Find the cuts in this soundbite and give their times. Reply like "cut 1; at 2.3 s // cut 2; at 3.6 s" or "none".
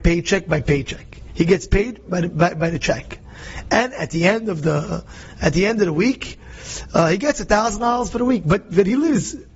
none